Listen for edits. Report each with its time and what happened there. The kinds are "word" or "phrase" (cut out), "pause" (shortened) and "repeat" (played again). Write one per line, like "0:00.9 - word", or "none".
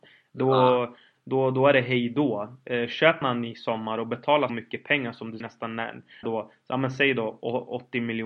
0:03.2 - word
0:04.5 - word
0:05.4 - word
0:06.2 - word